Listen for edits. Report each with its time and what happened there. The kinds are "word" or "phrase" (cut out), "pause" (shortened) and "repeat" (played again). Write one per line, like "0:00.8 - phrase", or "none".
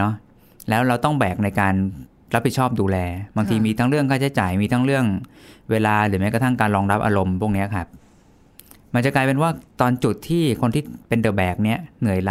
none